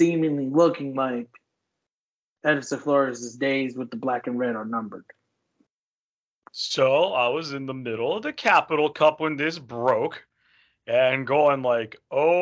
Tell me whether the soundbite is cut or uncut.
uncut